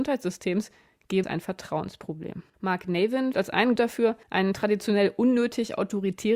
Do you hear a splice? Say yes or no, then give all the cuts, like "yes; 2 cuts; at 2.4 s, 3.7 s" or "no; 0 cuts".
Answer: yes; 5 cuts; at 1.2 s, 2.5 s, 3.3 s, 3.8 s, 4.2 s